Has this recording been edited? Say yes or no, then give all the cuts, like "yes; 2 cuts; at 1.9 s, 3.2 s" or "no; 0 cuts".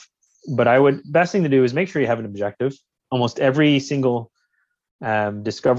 yes; 1 cut; at 1.0 s